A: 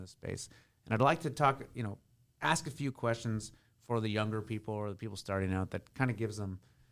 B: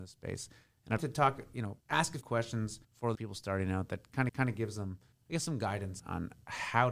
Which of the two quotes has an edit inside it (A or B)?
B